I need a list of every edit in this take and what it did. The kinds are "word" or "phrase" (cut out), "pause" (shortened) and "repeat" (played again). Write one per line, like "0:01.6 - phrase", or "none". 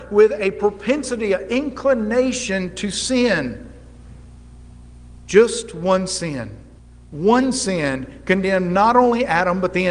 0:06.8 - pause